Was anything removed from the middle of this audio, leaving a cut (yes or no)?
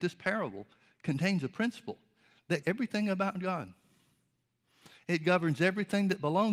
yes